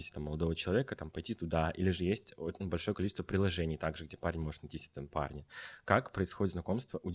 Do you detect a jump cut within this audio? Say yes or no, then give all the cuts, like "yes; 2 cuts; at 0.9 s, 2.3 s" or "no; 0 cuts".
no; 0 cuts